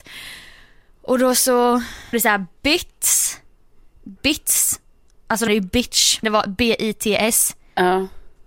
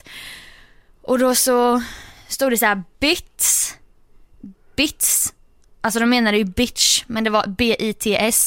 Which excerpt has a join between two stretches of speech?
first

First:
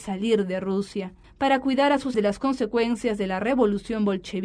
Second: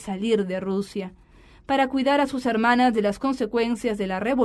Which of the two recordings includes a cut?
first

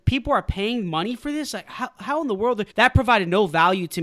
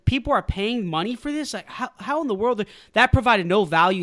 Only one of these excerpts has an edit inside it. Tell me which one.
first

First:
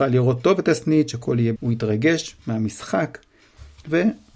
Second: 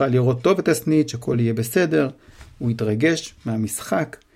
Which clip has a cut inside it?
first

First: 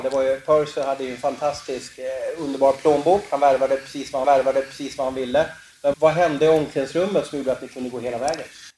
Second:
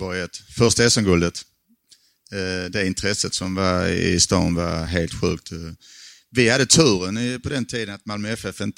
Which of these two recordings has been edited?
first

